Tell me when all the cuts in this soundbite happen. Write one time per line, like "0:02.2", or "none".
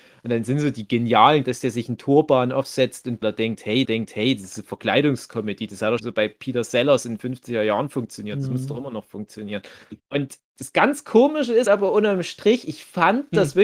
0:01.4
0:03.2
0:03.8
0:06.0
0:10.0
0:11.7